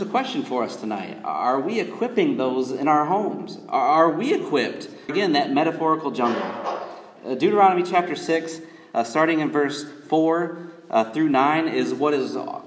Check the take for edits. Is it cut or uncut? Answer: cut